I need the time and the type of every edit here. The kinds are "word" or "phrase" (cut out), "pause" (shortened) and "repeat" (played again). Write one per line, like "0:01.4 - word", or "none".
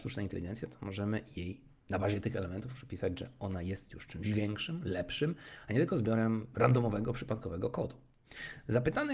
none